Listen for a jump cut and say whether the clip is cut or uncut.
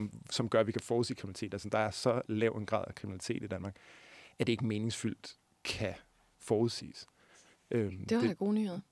uncut